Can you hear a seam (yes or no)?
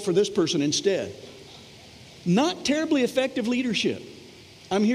no